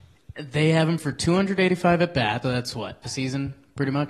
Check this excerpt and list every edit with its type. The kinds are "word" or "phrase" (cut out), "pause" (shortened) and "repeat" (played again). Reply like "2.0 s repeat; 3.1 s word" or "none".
1.0 s word; 2.4 s word; 3.0 s word